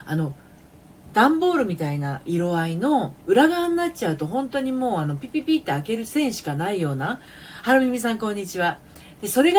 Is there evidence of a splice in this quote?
yes; 1 cut; at 3.2 s

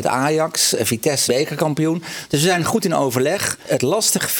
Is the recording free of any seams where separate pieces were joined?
no; 1 cut; at 1.3 s

